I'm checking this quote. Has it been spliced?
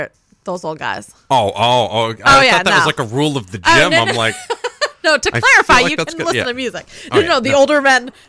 no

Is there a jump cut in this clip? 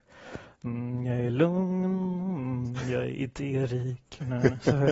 no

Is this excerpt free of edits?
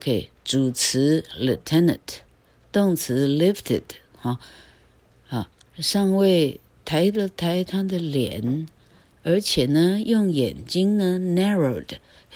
yes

